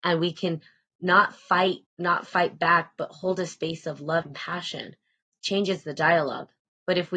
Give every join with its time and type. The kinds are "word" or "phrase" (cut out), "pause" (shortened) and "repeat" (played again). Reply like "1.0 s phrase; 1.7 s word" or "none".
1.9 s word; 4.2 s word